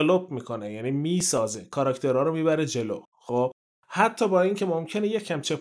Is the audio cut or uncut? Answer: cut